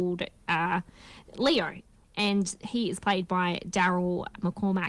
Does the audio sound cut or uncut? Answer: uncut